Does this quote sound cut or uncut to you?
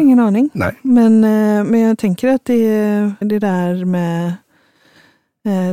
cut